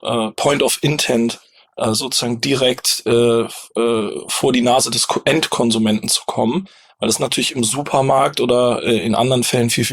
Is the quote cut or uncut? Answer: uncut